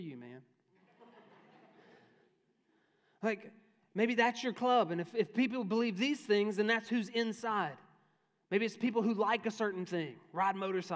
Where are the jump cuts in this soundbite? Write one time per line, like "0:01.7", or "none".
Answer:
none